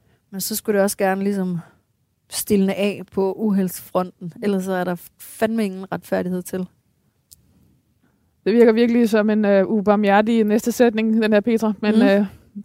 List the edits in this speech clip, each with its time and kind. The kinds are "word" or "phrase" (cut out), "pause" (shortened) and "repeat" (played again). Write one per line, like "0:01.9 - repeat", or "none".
none